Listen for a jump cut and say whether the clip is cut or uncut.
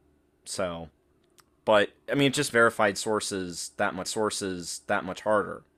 cut